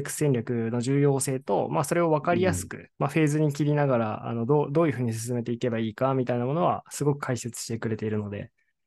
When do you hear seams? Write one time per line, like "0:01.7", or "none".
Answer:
0:02.9